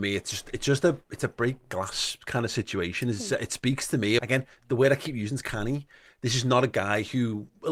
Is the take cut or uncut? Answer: cut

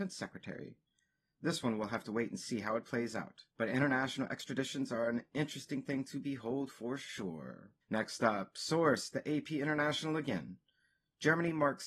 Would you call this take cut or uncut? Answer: cut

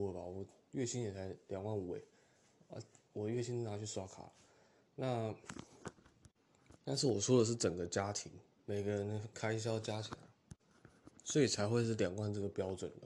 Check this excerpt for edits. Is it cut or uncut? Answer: cut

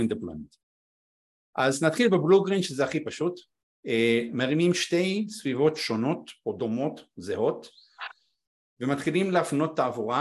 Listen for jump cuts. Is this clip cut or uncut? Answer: uncut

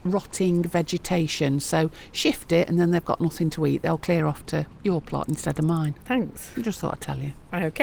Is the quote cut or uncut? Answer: uncut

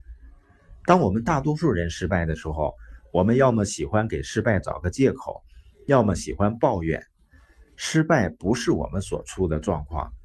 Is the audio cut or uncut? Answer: uncut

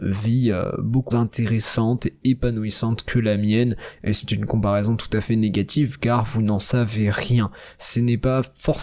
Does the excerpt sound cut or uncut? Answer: cut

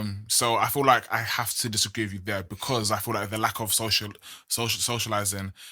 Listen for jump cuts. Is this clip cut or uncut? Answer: uncut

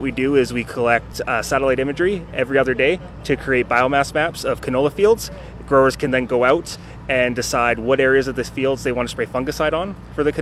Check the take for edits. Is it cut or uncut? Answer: uncut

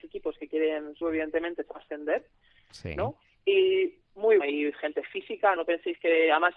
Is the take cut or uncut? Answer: cut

